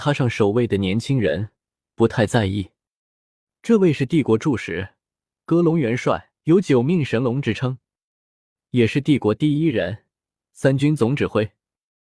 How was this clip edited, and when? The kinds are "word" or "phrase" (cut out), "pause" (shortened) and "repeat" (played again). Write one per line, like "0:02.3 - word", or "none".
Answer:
0:06.4 - pause